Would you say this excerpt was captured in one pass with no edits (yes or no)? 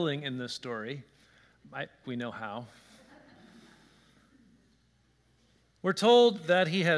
no